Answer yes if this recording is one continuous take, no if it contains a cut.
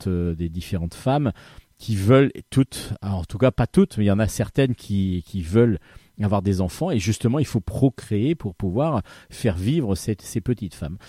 yes